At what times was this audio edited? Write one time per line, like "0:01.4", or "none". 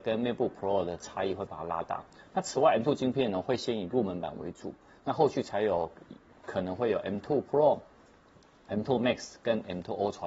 none